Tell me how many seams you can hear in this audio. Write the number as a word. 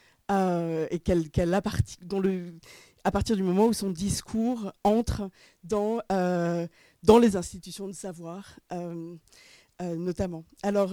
zero